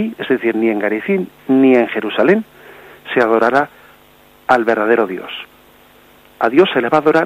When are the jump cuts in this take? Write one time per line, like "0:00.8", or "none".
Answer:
none